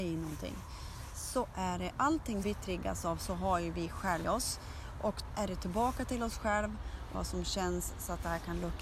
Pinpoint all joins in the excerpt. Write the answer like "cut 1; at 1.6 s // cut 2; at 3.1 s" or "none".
cut 1; at 2.4 s // cut 2; at 4.2 s // cut 3; at 5.3 s // cut 4; at 7.1 s